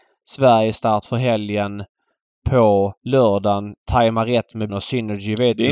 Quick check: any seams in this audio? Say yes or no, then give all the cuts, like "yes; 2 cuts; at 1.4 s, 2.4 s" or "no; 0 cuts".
yes; 2 cuts; at 3.0 s, 4.7 s